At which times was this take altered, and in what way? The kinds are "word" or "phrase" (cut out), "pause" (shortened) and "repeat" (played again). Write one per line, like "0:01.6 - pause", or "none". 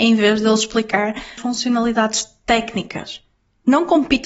0:01.4 - word